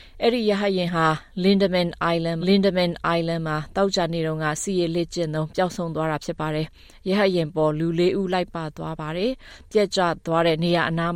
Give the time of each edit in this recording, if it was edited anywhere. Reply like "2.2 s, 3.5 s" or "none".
2.4 s